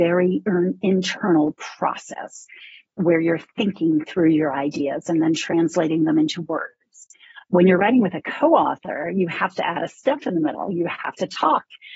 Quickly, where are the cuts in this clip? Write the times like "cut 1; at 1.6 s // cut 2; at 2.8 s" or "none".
none

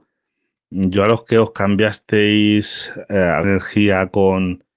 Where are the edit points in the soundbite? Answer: cut 1; at 3.4 s

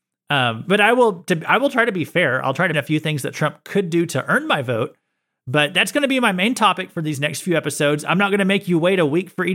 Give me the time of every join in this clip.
cut 1; at 2.7 s

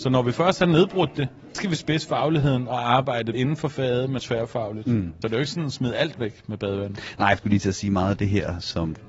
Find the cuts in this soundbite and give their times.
cut 1; at 1.5 s // cut 2; at 3.3 s // cut 3; at 4.2 s // cut 4; at 5.2 s // cut 5; at 7.4 s

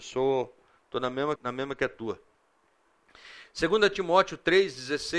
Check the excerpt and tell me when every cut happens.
cut 1; at 1.4 s

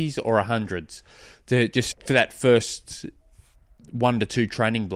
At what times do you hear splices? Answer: cut 1; at 1.9 s

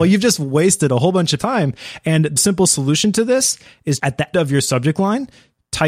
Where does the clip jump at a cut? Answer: cut 1; at 1.4 s // cut 2; at 2.4 s // cut 3; at 4.0 s // cut 4; at 4.3 s

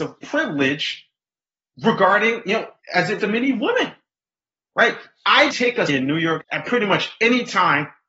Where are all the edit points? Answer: cut 1; at 2.8 s // cut 2; at 3.2 s // cut 3; at 5.5 s // cut 4; at 5.9 s // cut 5; at 6.4 s

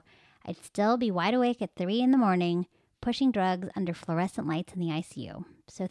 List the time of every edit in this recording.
none

